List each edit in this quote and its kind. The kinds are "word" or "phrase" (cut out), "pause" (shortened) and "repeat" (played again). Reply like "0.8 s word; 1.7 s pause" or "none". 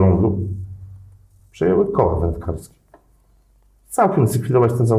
none

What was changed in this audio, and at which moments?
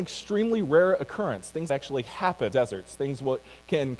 1.7 s phrase; 2.5 s word

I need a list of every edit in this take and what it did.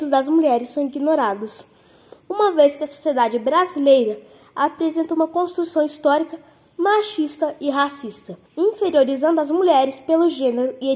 8.5 s pause

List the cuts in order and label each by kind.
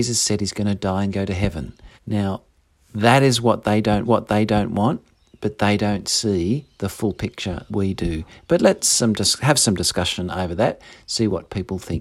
2.0 s pause; 4.0 s repeat; 7.7 s word

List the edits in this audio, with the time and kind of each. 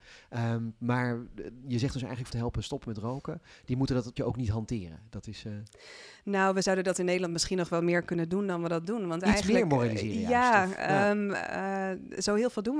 2.3 s phrase; 4.2 s word

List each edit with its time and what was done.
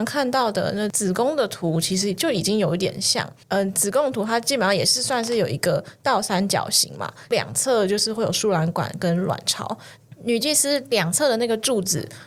3.4 s pause

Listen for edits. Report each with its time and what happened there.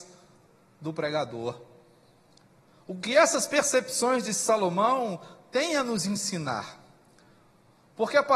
none

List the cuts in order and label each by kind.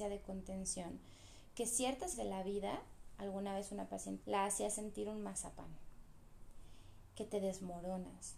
2.1 s word; 4.2 s phrase

